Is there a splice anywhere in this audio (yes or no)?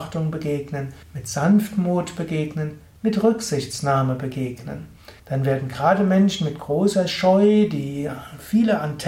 yes